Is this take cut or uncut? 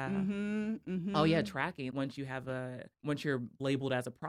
cut